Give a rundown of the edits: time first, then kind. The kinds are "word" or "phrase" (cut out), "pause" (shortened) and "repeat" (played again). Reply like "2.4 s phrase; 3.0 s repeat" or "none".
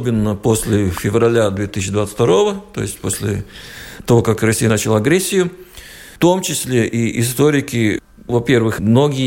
none